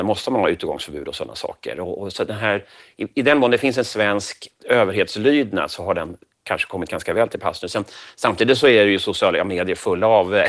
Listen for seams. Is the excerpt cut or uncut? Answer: uncut